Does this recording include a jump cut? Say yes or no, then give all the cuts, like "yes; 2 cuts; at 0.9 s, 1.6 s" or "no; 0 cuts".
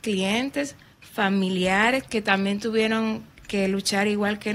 no; 0 cuts